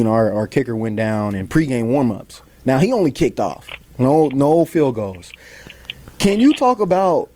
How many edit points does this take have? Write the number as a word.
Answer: zero